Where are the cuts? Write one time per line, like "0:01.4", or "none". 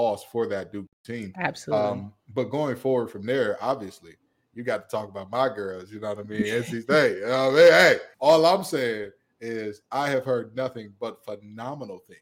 0:08.1